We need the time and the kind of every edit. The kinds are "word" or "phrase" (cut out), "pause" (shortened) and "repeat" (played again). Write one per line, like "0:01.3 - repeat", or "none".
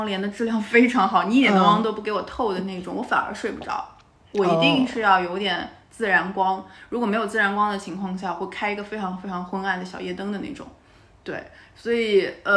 none